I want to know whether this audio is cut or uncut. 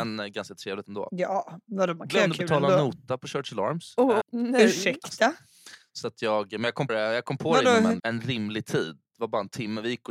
cut